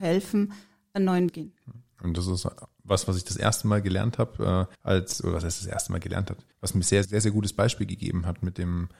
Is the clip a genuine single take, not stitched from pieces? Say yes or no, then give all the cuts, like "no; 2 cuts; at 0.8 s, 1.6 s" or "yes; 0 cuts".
no; 4 cuts; at 1.3 s, 4.8 s, 6.5 s, 7.0 s